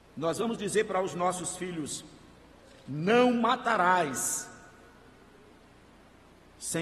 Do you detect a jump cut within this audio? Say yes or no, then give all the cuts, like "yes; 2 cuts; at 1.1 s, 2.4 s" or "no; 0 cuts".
no; 0 cuts